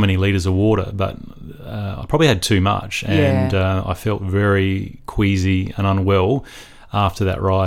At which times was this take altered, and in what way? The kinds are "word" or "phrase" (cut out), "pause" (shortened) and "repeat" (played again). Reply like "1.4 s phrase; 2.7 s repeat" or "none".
none